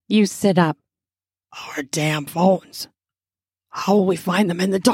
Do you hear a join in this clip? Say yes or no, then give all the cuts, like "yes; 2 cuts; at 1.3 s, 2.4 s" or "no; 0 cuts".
no; 0 cuts